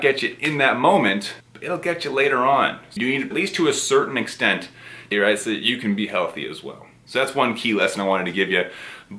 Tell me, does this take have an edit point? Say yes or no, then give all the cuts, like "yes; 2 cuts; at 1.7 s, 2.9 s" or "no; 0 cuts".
yes; 4 cuts; at 1.4 s, 3.0 s, 3.3 s, 5.1 s